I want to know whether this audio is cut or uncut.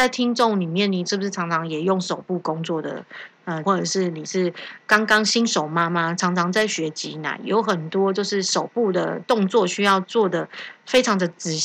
cut